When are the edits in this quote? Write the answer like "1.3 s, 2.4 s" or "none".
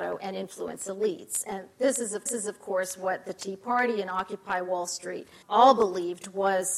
2.3 s, 5.4 s